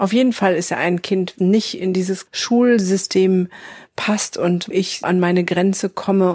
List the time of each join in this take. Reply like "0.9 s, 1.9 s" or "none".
1.4 s, 2.3 s, 4.7 s, 5.0 s